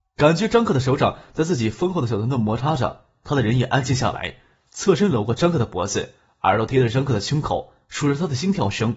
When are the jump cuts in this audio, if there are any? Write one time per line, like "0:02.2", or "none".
none